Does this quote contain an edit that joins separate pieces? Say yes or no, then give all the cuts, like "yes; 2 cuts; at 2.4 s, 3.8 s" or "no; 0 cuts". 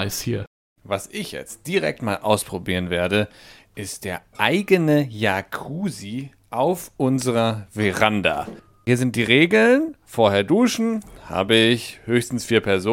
no; 0 cuts